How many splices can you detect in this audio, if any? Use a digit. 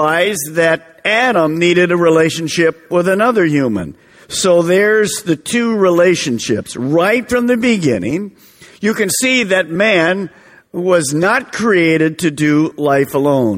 0